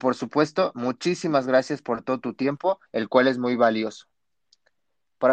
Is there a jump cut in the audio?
yes; 1 cut; at 2.9 s

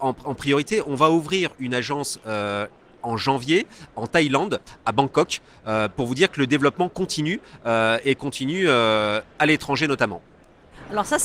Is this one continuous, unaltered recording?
no; 1 cut; at 9.3 s

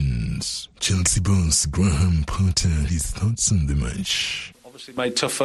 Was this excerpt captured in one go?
no; 1 cut; at 2.9 s

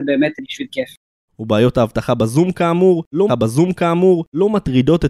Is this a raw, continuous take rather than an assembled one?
no; 1 cut; at 3.3 s

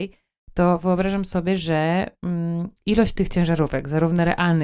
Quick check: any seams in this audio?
no; 0 cuts

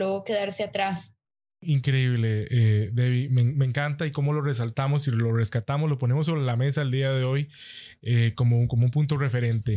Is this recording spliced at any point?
no; 0 cuts

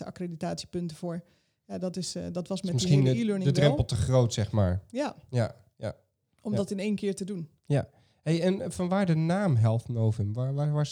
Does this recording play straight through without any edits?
yes; 0 cuts

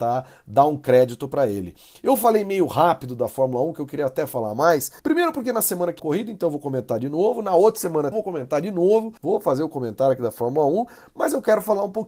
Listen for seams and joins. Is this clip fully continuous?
no; 4 cuts; at 5.0 s, 6.0 s, 8.1 s, 9.2 s

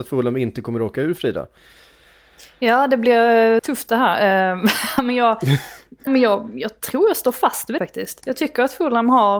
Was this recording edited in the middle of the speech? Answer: yes; 3 cuts; at 3.6 s, 6.1 s, 7.8 s

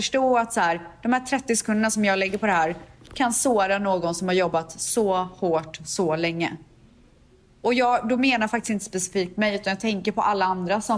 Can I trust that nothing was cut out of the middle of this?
yes; 0 cuts

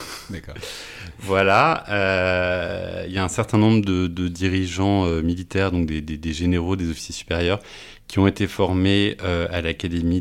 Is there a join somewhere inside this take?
no; 0 cuts

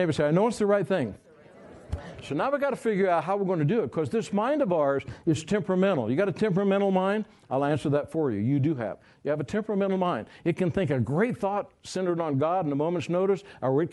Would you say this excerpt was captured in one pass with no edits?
yes; 0 cuts

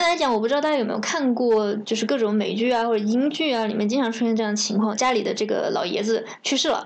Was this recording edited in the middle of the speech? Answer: yes; 1 cut; at 4.9 s

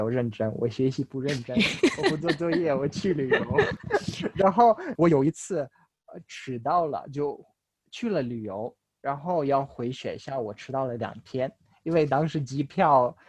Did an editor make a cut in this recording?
no; 0 cuts

